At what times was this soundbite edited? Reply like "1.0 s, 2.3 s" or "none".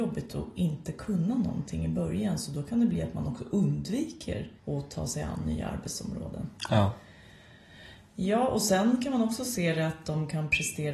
4.6 s